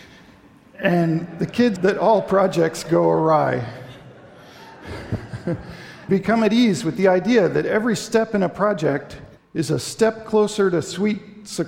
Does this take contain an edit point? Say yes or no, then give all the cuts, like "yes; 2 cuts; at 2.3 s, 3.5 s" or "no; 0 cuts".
yes; 3 cuts; at 1.8 s, 6.1 s, 9.4 s